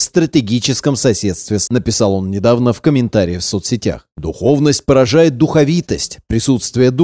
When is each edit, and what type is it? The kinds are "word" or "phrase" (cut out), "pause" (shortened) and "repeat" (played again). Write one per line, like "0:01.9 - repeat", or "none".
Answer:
0:01.7 - word